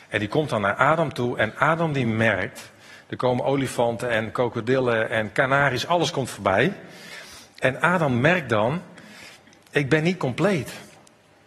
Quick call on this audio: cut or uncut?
uncut